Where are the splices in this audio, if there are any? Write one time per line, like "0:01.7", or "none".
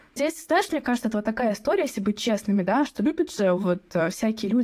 none